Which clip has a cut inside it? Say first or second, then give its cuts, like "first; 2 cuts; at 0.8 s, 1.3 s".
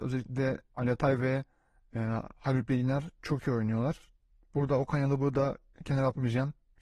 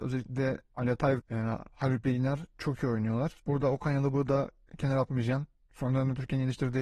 second; 2 cuts; at 1.2 s, 3.4 s